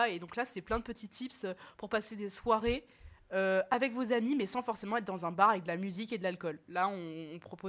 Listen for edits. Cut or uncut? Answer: uncut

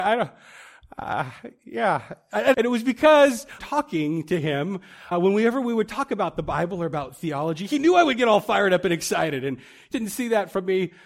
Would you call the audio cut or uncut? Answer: cut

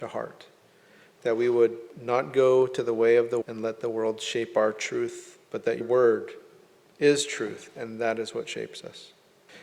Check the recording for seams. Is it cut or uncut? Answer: cut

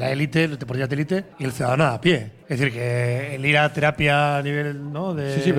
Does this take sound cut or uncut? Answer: cut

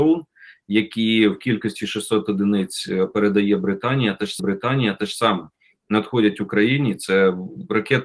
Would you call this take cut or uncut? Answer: cut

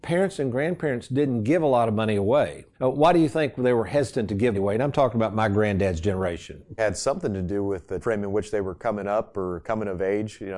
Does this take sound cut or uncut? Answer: cut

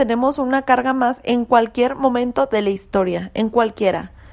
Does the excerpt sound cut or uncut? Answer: uncut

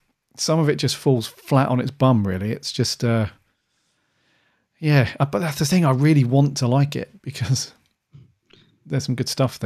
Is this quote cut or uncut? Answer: uncut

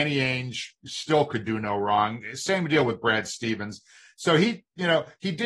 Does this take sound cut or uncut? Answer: uncut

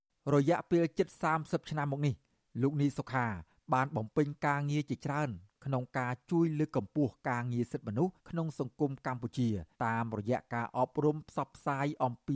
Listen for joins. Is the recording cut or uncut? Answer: cut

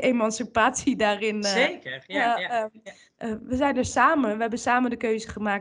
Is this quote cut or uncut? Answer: uncut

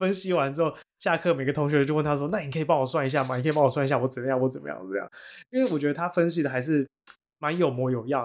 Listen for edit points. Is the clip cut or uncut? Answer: uncut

